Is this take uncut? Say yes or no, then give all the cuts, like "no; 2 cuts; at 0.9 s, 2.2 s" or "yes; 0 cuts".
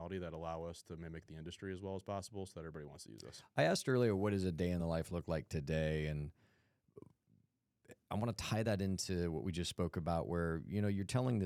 yes; 0 cuts